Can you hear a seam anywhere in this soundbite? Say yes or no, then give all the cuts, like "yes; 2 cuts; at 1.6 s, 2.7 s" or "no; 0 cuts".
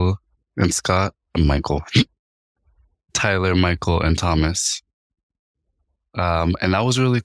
no; 0 cuts